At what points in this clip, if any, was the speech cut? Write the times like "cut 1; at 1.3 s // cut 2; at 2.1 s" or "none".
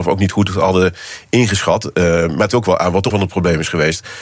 cut 1; at 2.5 s // cut 2; at 3.1 s